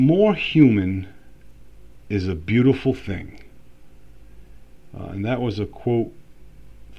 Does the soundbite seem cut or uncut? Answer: uncut